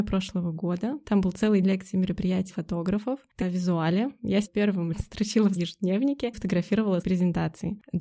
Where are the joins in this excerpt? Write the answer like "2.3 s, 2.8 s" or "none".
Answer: 1.6 s, 2.5 s, 3.4 s, 4.4 s, 4.9 s, 5.6 s, 6.3 s, 7.0 s